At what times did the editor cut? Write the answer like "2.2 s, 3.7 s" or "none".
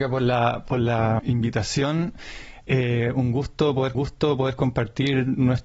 1.2 s, 3.9 s